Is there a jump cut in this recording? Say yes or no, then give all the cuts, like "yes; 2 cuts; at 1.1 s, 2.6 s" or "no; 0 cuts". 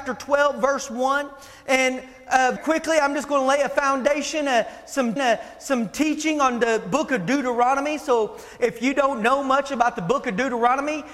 yes; 2 cuts; at 2.6 s, 5.2 s